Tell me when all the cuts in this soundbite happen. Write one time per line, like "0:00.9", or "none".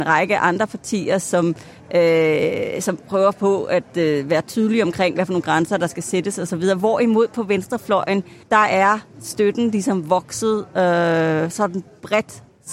0:08.4